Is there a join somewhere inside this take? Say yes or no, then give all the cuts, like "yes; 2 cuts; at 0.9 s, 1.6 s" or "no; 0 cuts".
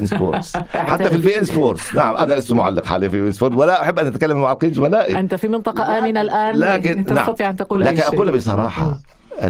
no; 0 cuts